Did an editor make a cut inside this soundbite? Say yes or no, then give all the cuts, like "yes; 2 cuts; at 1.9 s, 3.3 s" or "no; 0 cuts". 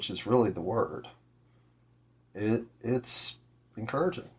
no; 0 cuts